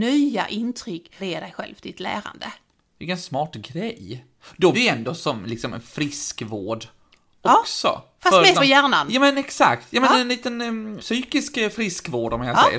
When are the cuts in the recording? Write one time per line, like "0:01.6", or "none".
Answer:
0:01.2
0:04.7
0:08.5
0:11.0